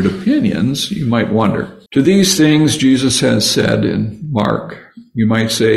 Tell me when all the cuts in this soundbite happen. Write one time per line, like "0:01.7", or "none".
0:01.9